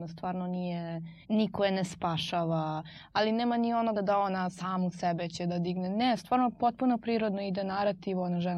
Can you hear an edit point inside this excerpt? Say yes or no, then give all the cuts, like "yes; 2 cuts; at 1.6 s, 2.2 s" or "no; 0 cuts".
yes; 2 cuts; at 1.2 s, 3.9 s